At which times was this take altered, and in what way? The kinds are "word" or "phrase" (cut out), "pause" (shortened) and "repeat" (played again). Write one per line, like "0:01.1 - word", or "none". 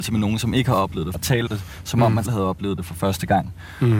0:01.1 - word
0:01.5 - word
0:02.2 - word